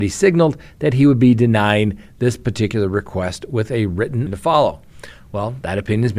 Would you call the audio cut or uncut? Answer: cut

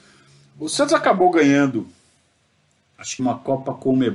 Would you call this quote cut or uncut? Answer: cut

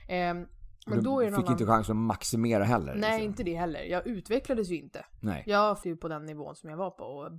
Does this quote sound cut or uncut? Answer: cut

